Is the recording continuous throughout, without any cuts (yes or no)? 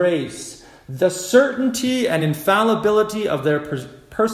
yes